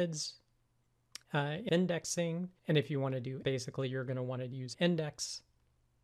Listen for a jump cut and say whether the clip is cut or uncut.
cut